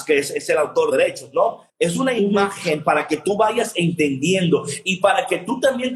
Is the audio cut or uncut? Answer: cut